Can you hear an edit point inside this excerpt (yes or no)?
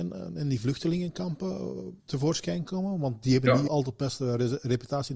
yes